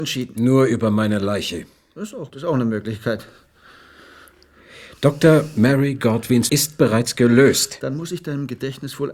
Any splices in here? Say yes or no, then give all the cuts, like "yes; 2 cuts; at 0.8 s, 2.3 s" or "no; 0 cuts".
yes; 2 cuts; at 2.3 s, 6.5 s